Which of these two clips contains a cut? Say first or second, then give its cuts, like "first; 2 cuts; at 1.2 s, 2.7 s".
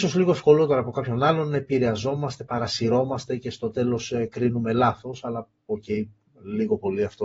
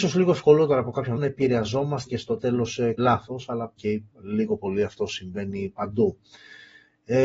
second; 5 cuts; at 1.2 s, 2.1 s, 3.0 s, 3.8 s, 4.1 s